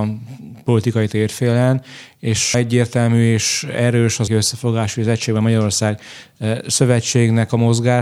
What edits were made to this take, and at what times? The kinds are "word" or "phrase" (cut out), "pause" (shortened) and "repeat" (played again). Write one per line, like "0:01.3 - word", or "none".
0:02.5 - word
0:04.3 - word